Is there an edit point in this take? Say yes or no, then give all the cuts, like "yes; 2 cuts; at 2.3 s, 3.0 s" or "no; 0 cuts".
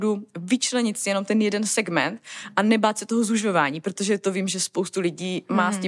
no; 0 cuts